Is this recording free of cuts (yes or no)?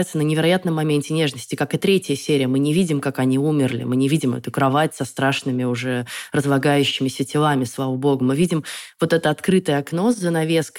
yes